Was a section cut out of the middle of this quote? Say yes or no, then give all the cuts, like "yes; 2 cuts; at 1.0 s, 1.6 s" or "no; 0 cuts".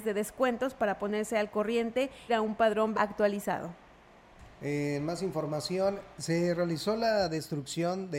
yes; 2 cuts; at 2.3 s, 2.9 s